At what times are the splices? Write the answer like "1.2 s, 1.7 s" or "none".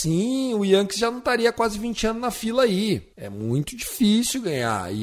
3.1 s